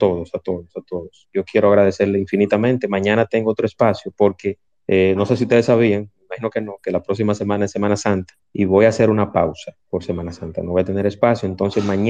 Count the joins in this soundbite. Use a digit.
3